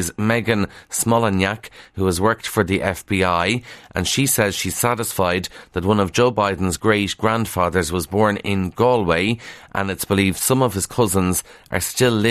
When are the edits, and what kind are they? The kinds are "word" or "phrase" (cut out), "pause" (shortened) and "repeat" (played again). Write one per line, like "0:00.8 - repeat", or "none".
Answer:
0:06.8 - word